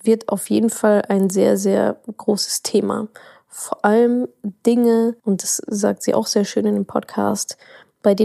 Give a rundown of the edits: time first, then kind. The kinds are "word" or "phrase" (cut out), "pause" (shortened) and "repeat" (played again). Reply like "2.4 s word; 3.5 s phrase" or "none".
5.2 s pause; 5.7 s word